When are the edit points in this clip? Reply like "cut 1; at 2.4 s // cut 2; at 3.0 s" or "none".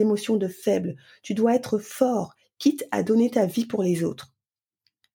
none

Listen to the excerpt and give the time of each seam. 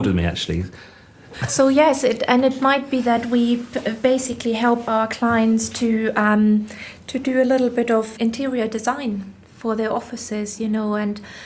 cut 1; at 8.2 s

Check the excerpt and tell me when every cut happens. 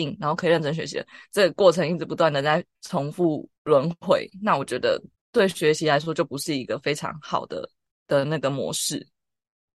cut 1; at 2.7 s // cut 2; at 3.6 s // cut 3; at 5.1 s // cut 4; at 7.9 s

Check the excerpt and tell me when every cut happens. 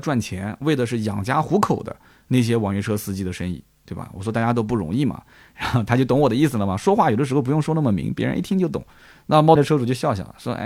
cut 1; at 9.6 s

